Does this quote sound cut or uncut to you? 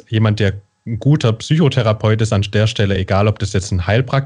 uncut